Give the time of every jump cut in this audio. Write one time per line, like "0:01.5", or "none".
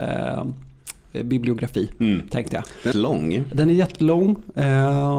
0:02.9